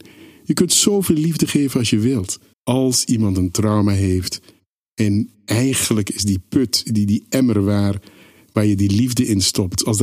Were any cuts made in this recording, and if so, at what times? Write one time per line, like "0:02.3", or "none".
0:02.5